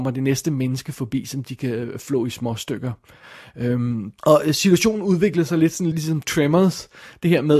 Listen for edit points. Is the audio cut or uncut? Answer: cut